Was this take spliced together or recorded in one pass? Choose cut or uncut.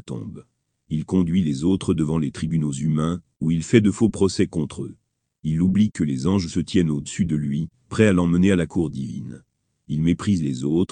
uncut